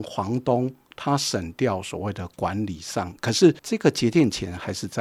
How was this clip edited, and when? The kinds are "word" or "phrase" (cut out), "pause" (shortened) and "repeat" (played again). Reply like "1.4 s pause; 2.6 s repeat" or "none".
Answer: 3.6 s pause